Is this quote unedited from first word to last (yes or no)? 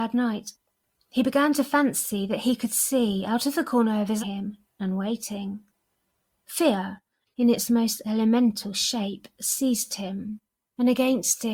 no